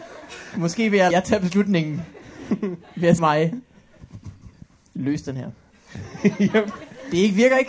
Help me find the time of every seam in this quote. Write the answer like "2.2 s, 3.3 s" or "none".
1.1 s, 3.2 s